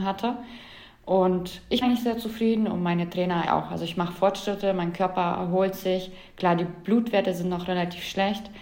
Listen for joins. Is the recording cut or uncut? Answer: cut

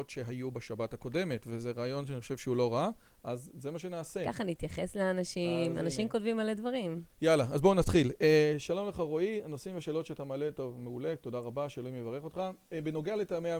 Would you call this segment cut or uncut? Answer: uncut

